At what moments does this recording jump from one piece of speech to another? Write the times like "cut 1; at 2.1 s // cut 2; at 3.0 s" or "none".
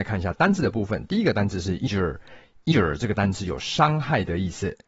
cut 1; at 1.9 s // cut 2; at 2.7 s